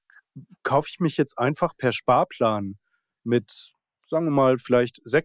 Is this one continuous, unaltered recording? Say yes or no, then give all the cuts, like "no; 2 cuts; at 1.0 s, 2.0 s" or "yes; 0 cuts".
yes; 0 cuts